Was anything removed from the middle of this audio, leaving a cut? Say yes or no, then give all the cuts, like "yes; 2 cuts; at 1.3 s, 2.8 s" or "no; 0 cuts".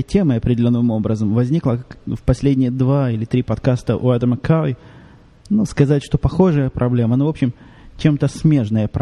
no; 0 cuts